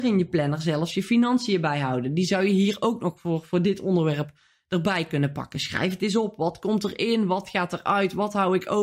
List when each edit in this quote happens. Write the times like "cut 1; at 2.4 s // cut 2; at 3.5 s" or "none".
none